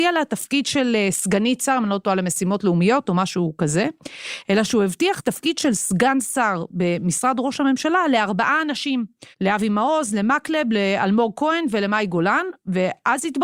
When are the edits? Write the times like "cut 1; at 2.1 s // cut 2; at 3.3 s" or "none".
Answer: cut 1; at 9.3 s